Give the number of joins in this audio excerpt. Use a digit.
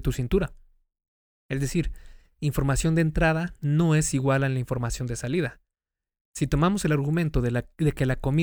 0